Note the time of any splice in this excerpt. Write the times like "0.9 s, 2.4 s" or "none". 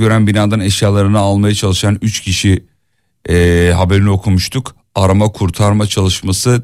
none